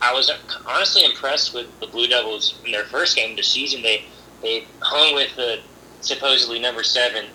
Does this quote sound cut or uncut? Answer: uncut